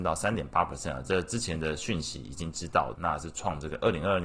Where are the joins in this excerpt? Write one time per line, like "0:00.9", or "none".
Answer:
0:03.0